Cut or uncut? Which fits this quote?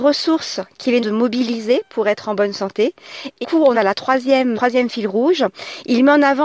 cut